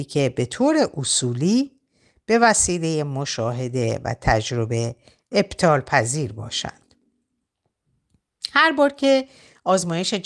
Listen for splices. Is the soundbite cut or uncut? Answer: uncut